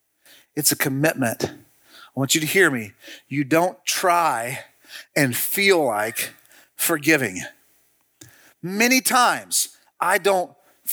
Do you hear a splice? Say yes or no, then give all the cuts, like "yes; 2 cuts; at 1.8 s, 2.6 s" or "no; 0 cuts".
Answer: no; 0 cuts